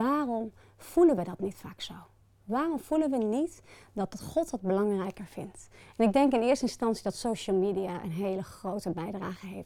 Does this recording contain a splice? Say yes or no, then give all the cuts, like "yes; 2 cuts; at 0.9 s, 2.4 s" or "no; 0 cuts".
no; 0 cuts